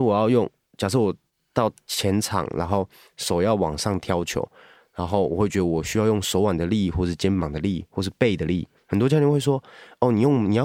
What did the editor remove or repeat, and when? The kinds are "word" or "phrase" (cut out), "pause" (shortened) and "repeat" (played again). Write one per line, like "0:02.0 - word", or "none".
none